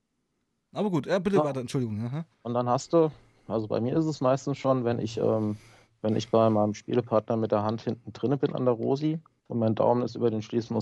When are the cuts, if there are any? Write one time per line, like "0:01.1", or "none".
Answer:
0:02.3
0:09.4